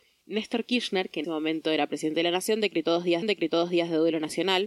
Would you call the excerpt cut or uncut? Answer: cut